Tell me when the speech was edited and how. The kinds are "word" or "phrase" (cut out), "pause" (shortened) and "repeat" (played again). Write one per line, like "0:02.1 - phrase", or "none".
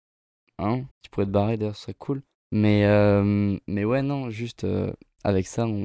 0:00.9 - pause
0:02.4 - pause